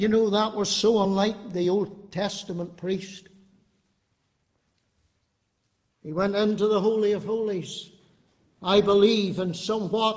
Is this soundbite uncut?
yes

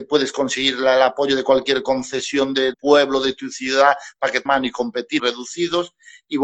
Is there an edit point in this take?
yes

